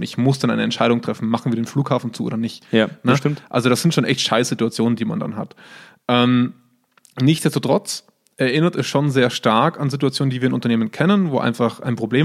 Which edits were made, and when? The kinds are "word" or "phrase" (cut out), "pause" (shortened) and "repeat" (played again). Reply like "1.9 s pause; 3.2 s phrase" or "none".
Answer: none